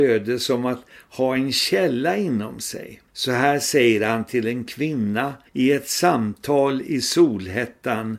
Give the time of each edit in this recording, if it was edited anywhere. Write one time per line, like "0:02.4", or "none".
0:03.1
0:05.5